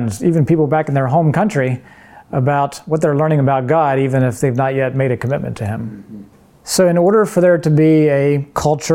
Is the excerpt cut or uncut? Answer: uncut